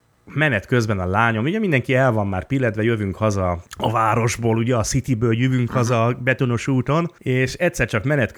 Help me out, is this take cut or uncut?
cut